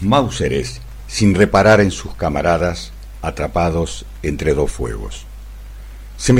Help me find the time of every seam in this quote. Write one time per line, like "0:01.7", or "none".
none

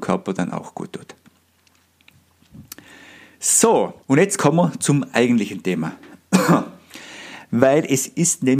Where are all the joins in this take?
0:04.0

